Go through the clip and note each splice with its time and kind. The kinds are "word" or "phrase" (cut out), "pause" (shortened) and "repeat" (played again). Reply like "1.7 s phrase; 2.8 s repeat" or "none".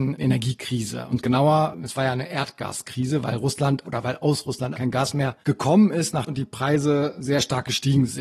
3.8 s word; 4.7 s word; 5.4 s pause; 6.3 s word